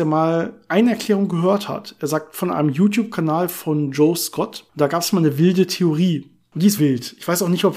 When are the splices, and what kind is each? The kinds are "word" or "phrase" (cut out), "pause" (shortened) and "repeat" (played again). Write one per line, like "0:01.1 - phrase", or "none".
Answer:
0:06.8 - word

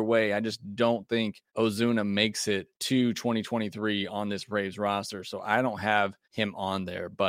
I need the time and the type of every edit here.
0:01.5 - pause
0:02.7 - pause
0:06.2 - pause

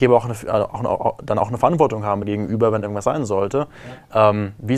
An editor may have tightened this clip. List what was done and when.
0:02.2 - word

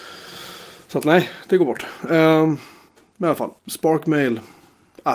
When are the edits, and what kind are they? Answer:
0:02.9 - pause
0:03.6 - pause

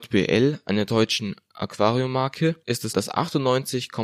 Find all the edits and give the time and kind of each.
0:02.9 - word

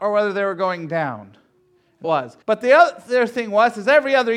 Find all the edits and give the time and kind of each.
0:02.0 - phrase
0:02.4 - pause

